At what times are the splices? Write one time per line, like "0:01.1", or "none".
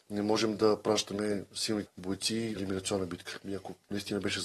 0:01.9
0:02.6

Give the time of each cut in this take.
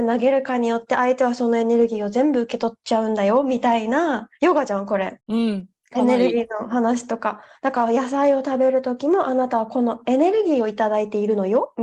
0:04.3
0:05.2

